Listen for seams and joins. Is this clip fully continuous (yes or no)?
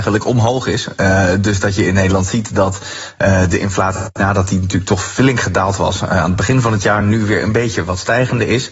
yes